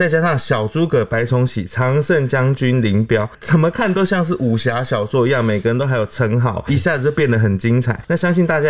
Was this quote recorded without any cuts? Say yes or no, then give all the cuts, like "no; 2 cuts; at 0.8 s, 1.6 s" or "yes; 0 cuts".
no; 1 cut; at 6.7 s